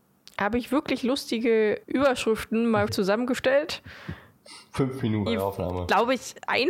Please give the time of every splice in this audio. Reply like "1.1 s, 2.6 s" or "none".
1.8 s, 2.9 s, 5.3 s